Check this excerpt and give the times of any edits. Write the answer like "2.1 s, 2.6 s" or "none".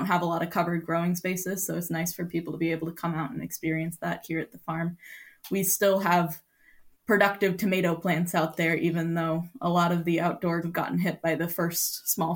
10.6 s